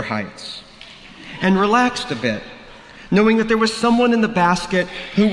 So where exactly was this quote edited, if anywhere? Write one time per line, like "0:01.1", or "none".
none